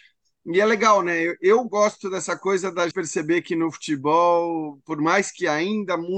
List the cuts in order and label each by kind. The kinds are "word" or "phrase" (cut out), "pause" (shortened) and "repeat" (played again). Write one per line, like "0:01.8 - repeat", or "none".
0:02.9 - word